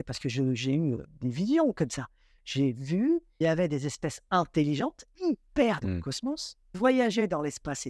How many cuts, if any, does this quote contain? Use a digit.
4